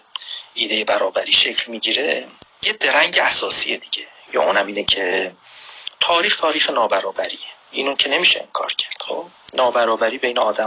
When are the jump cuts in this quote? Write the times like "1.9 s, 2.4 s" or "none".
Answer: 7.6 s